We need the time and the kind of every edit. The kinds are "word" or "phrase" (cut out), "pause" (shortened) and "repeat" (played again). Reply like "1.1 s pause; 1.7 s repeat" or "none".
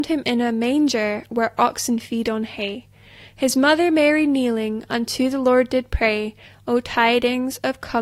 none